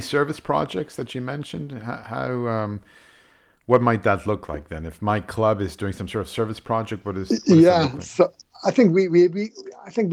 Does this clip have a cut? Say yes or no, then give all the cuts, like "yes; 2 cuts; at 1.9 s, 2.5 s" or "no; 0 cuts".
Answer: no; 0 cuts